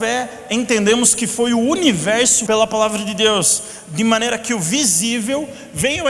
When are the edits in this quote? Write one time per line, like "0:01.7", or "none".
0:02.5